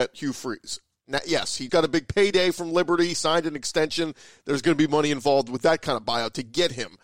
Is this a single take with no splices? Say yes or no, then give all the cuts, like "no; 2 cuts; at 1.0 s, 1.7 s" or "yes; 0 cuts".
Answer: no; 1 cut; at 1.7 s